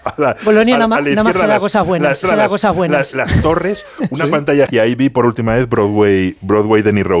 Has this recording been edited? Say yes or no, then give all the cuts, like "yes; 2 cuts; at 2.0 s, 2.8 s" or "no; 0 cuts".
yes; 2 cuts; at 2.2 s, 4.7 s